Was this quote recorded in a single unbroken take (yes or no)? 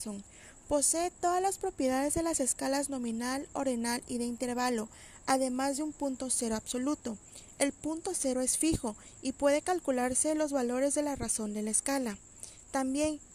yes